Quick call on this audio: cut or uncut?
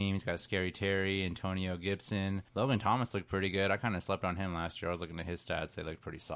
cut